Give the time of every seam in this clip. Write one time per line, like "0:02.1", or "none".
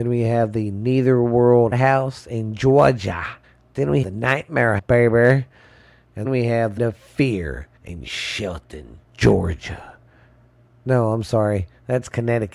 0:01.7
0:03.4
0:04.0
0:04.8
0:06.2
0:06.8
0:07.8
0:09.0